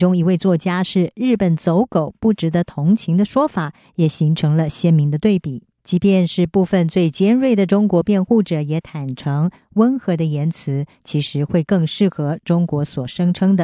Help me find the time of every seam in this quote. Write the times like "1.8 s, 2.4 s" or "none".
5.7 s